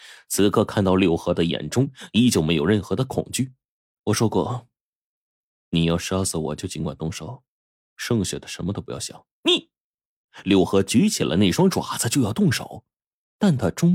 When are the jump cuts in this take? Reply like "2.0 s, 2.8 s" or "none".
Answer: 3.6 s, 9.3 s